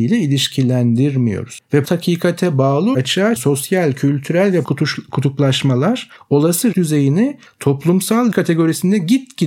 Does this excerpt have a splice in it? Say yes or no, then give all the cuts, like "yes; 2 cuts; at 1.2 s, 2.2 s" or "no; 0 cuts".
yes; 6 cuts; at 1.8 s, 2.9 s, 3.4 s, 4.6 s, 6.7 s, 8.3 s